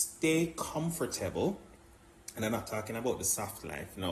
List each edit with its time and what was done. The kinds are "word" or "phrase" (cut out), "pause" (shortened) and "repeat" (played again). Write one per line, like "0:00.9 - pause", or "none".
none